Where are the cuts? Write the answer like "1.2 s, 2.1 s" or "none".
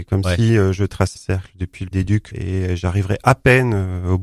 1.2 s, 1.9 s, 2.3 s